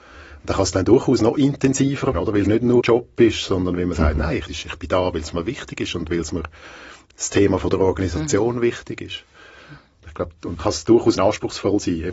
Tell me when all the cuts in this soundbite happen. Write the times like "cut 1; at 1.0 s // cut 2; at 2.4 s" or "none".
cut 1; at 2.1 s // cut 2; at 2.5 s // cut 3; at 2.8 s // cut 4; at 4.5 s // cut 5; at 10.6 s // cut 6; at 11.2 s